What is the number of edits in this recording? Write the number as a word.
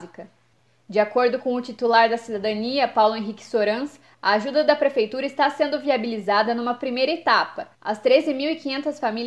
one